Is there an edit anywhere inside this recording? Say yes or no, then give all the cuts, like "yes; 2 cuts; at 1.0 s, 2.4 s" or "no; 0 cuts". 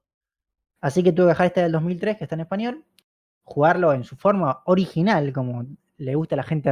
no; 0 cuts